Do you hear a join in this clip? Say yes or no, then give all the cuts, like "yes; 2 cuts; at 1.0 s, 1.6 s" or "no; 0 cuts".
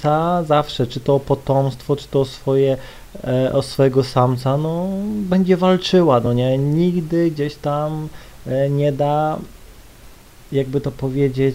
no; 0 cuts